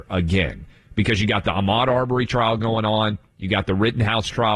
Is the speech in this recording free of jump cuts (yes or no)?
yes